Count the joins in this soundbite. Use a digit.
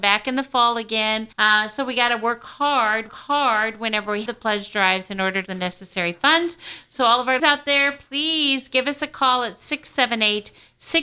5